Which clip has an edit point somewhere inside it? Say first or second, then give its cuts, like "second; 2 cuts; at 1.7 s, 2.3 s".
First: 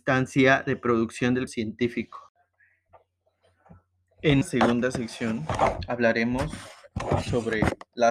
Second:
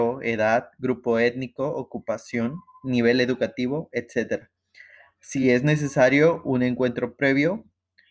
first; 2 cuts; at 1.5 s, 4.4 s